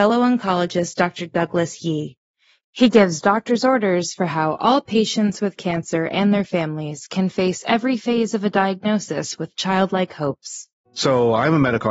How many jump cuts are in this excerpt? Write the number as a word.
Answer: zero